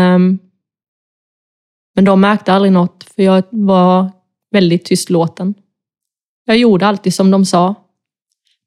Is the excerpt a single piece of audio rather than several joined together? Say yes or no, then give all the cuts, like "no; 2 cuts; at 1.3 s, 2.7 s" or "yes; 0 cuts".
yes; 0 cuts